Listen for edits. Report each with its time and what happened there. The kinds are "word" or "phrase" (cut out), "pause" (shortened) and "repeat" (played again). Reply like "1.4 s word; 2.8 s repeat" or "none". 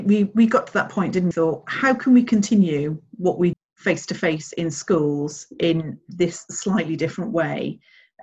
1.3 s phrase; 3.5 s word